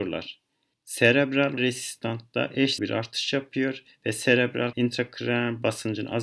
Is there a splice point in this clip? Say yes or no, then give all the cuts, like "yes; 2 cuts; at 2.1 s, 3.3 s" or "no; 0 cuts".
yes; 3 cuts; at 1.6 s, 2.8 s, 4.7 s